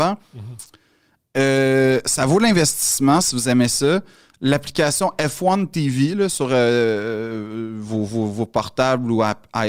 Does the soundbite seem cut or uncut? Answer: uncut